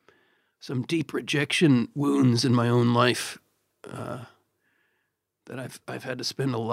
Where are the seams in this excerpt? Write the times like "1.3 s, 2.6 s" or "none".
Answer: none

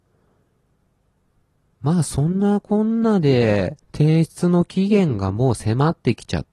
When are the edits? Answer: 3.8 s

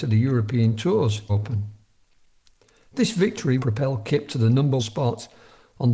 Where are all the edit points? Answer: 1.3 s, 3.6 s, 4.8 s

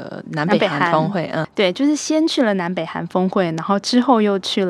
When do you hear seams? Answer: 1.4 s

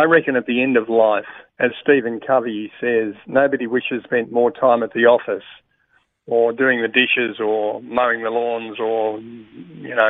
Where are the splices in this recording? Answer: 1.5 s, 4.0 s

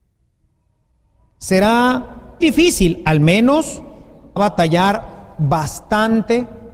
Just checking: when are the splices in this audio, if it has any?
2.4 s, 4.4 s

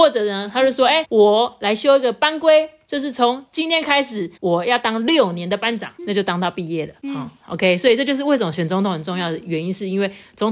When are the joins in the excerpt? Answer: 1.0 s, 4.4 s

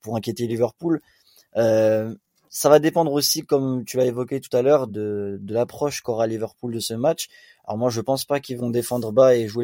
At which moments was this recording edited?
4.9 s

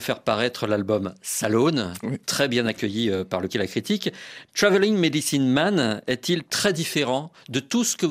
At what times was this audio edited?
3.5 s

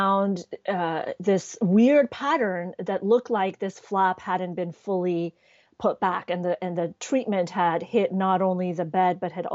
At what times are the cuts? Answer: none

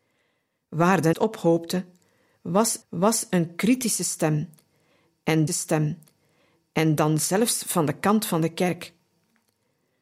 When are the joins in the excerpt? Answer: 1.1 s, 2.8 s, 5.5 s

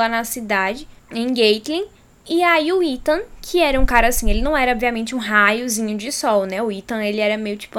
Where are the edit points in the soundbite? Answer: none

